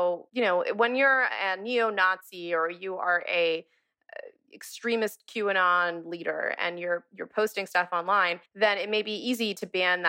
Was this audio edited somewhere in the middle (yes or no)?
yes